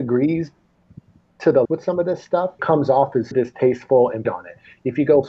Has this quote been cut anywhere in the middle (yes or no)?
yes